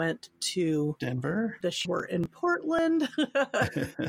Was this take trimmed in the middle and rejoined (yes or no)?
yes